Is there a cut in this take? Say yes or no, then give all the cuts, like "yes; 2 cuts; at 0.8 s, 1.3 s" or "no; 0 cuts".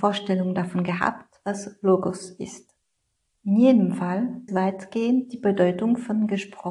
yes; 2 cuts; at 3.0 s, 4.5 s